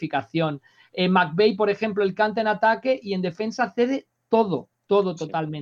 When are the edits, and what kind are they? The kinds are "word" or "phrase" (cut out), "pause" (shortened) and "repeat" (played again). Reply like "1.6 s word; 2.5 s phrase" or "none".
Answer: none